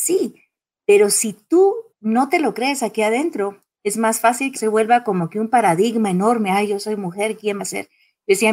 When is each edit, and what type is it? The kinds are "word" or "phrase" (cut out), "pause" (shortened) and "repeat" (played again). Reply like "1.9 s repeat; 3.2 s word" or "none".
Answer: 1.9 s pause; 3.7 s pause; 4.5 s word; 7.6 s phrase